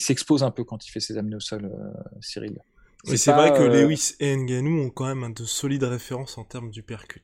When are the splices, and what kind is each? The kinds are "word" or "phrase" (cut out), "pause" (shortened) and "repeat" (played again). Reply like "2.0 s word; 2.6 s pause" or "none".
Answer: none